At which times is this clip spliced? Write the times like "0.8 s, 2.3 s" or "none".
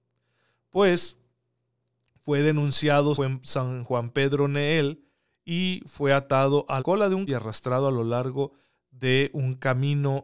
3.1 s, 6.8 s, 7.3 s